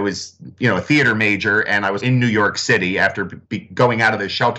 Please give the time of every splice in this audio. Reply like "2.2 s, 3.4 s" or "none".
2.0 s, 3.5 s